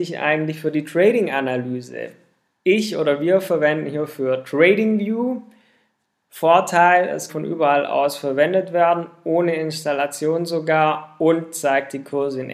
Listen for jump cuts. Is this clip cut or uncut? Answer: cut